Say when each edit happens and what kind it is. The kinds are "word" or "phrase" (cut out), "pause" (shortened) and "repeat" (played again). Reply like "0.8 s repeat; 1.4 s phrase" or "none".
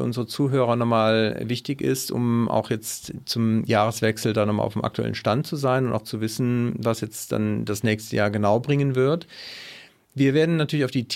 none